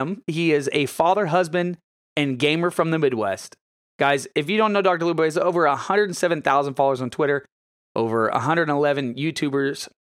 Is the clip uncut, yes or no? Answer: yes